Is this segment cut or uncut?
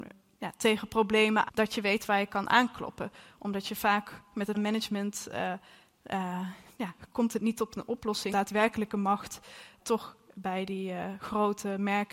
cut